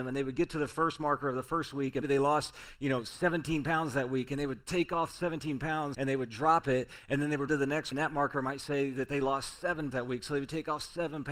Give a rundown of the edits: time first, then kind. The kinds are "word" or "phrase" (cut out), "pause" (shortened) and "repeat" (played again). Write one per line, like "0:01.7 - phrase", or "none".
0:02.0 - word
0:05.9 - word
0:07.5 - word
0:07.9 - phrase
0:09.9 - word

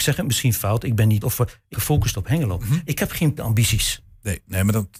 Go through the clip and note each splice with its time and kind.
0:01.2 - word
0:01.7 - word
0:03.4 - word

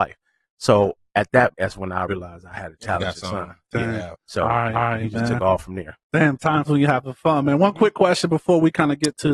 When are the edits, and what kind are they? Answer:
0:01.5 - word
0:02.1 - word
0:04.2 - pause
0:04.7 - repeat
0:06.6 - word

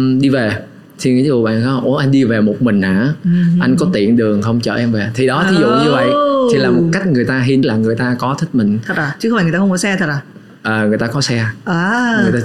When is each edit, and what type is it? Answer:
0:07.6 - phrase

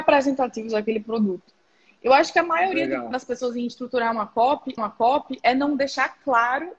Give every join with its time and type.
0:03.1 - word
0:04.8 - repeat

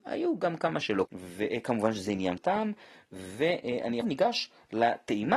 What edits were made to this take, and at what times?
0:01.1 - phrase
0:02.4 - word
0:04.0 - word

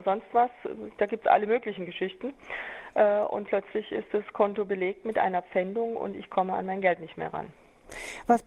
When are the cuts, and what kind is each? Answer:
none

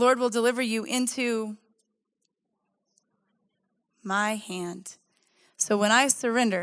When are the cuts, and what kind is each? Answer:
none

